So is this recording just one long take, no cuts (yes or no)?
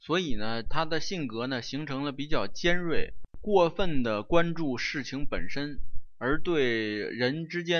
no